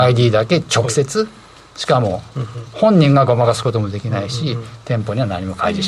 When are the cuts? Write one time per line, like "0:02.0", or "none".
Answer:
none